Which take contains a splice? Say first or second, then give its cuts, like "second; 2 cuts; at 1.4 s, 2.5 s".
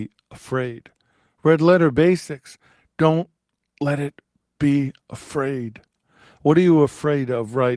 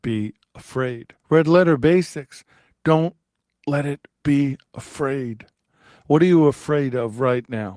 second; 2 cuts; at 1.2 s, 4.1 s